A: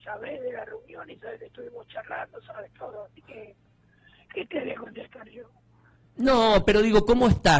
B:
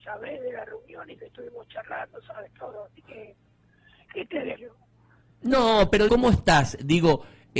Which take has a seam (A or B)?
B